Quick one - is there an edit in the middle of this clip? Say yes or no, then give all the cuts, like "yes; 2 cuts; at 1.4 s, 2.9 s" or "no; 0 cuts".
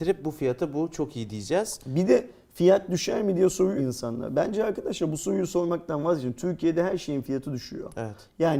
yes; 1 cut; at 3.8 s